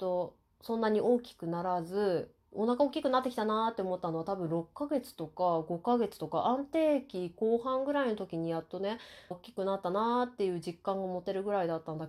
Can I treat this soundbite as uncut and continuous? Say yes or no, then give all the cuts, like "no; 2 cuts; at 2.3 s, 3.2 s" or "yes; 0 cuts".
no; 1 cut; at 9.3 s